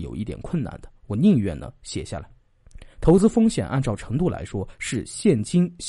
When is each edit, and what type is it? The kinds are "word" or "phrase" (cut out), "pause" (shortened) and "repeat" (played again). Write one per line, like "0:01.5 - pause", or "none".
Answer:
0:02.9 - pause